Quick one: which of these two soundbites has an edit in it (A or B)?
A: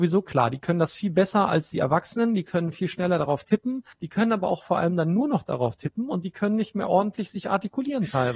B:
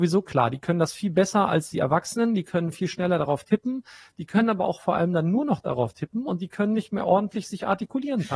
A